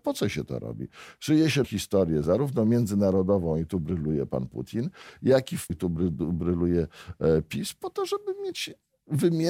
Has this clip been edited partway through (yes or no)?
yes